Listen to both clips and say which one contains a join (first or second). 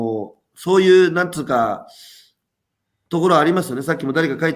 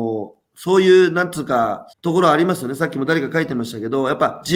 second